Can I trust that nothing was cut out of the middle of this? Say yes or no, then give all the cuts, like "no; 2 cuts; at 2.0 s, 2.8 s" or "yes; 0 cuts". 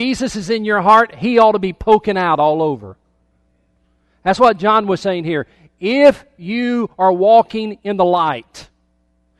yes; 0 cuts